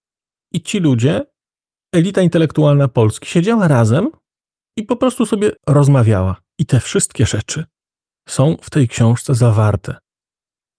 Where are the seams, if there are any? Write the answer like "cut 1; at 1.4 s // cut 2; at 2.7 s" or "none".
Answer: cut 1; at 5.6 s